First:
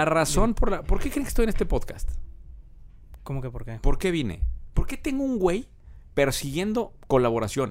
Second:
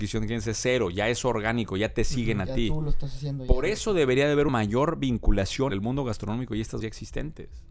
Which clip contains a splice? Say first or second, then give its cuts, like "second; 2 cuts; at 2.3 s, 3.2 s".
second; 3 cuts; at 4.5 s, 5.7 s, 6.8 s